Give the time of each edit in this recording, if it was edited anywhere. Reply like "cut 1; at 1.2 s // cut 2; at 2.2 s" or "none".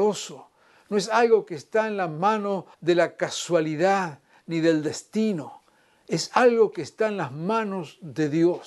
cut 1; at 2.7 s